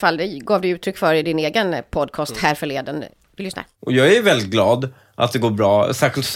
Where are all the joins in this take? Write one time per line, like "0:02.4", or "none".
none

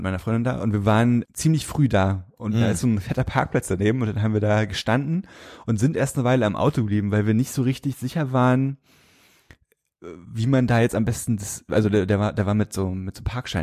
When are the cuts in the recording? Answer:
0:01.2

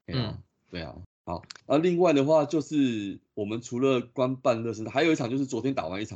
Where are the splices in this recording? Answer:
0:01.6

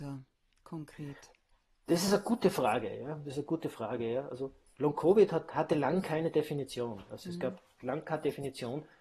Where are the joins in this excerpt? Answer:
none

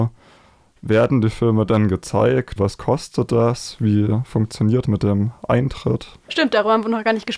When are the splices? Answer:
0:02.6
0:04.8
0:06.2

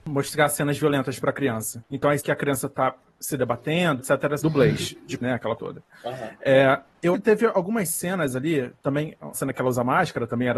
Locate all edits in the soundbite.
0:02.2
0:04.0
0:04.4
0:05.2
0:05.6
0:07.1
0:09.3

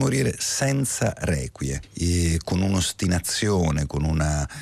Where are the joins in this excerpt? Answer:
none

